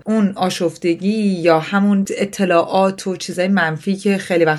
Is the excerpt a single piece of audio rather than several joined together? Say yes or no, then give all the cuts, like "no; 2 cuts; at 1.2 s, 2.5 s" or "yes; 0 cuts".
yes; 0 cuts